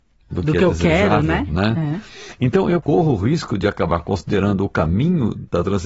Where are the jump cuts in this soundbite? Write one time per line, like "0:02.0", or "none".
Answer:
none